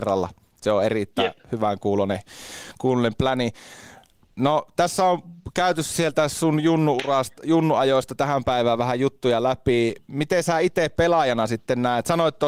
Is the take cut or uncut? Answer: uncut